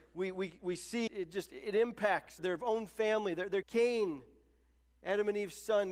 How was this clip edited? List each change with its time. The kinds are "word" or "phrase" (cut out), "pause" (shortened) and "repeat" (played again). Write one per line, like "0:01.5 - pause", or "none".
0:01.1 - word
0:02.4 - word
0:03.6 - word